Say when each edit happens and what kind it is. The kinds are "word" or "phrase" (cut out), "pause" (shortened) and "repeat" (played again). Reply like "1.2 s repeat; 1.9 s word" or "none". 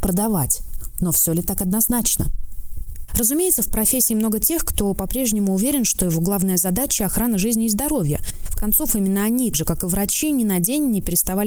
8.6 s word; 9.5 s word